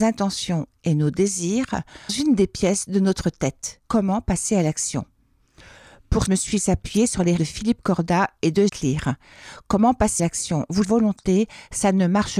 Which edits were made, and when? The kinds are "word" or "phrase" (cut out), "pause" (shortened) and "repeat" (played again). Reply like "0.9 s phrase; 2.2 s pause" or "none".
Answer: 2.1 s word; 3.9 s pause; 6.3 s phrase; 7.4 s word; 8.7 s word; 10.2 s word; 10.8 s phrase